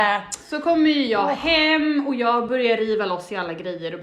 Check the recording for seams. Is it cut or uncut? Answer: uncut